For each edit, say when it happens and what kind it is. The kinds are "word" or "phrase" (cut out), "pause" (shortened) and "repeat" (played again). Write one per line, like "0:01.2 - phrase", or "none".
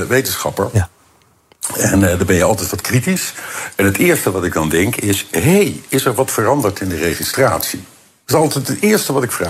none